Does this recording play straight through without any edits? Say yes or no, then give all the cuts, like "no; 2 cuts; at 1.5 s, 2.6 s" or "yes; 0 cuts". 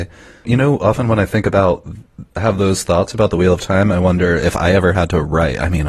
no; 1 cut; at 2.3 s